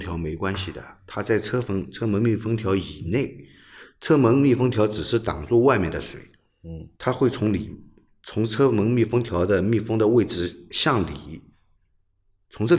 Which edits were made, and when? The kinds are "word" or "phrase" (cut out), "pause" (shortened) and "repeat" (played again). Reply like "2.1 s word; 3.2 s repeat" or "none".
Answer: 6.9 s pause